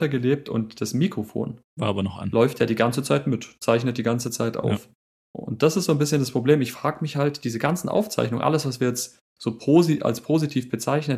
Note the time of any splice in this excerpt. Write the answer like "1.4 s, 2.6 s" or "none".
1.7 s